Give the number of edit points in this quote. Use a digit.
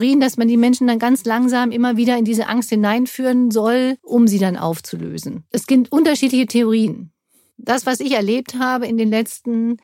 1